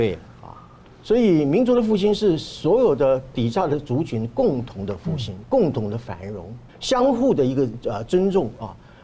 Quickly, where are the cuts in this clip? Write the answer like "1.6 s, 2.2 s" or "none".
6.7 s